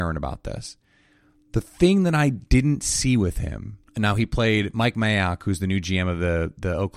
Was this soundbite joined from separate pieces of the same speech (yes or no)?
yes